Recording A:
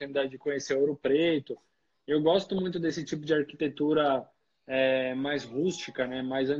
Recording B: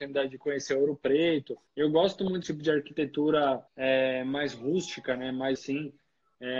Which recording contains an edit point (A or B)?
B